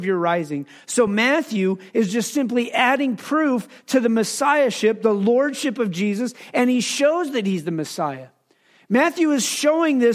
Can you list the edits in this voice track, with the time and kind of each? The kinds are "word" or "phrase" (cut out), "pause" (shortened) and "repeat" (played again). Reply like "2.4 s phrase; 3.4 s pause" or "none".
none